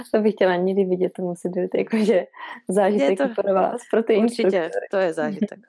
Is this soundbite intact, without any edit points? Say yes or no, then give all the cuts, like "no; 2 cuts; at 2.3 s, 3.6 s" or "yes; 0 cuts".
yes; 0 cuts